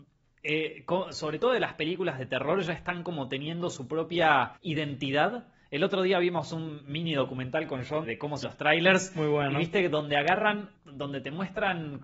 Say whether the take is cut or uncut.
cut